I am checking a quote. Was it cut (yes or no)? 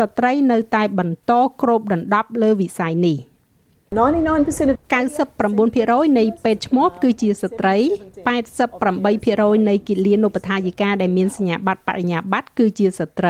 yes